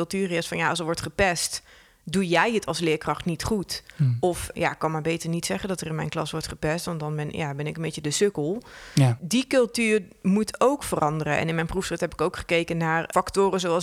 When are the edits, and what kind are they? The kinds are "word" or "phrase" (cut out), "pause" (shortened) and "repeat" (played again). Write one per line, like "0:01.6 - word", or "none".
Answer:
none